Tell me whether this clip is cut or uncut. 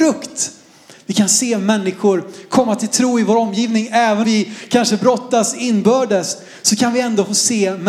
cut